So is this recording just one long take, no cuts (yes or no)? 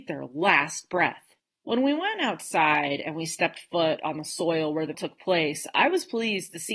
no